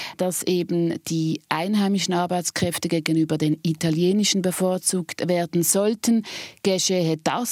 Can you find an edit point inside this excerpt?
no; 0 cuts

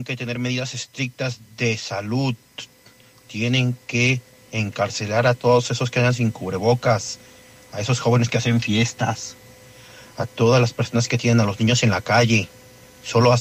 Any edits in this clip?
no; 0 cuts

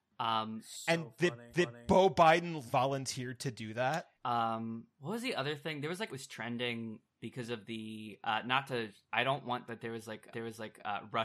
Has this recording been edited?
yes; 7 cuts; at 1.5 s, 2.7 s, 4.1 s, 6.1 s, 7.1 s, 9.7 s, 10.3 s

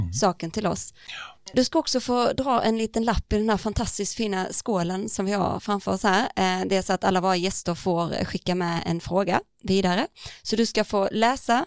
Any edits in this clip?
no; 0 cuts

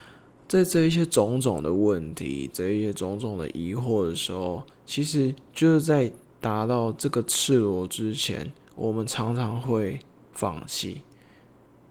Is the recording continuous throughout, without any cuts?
no; 1 cut; at 4.7 s

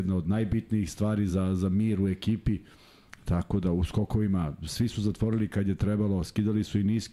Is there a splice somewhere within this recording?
no; 0 cuts

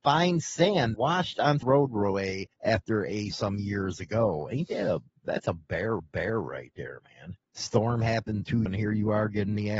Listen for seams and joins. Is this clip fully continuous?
no; 8 cuts; at 0.9 s, 1.6 s, 2.5 s, 3.3 s, 5.1 s, 6.0 s, 7.4 s, 8.7 s

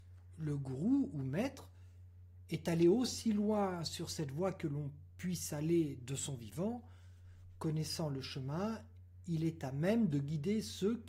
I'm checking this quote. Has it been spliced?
no; 0 cuts

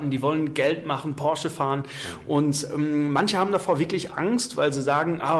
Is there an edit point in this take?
no; 0 cuts

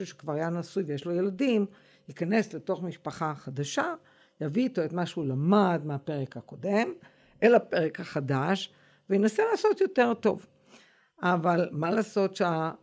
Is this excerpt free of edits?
yes; 0 cuts

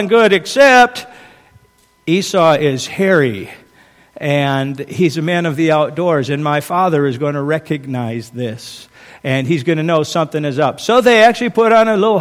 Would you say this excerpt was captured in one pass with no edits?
yes; 0 cuts

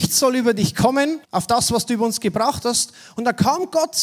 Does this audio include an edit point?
yes; 1 cut; at 1.2 s

